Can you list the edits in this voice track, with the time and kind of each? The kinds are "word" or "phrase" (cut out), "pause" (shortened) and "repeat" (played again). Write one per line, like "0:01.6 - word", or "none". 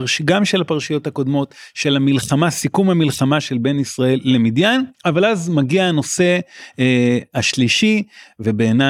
0:04.9 - pause